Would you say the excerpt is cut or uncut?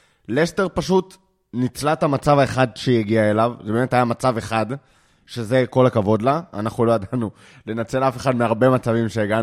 uncut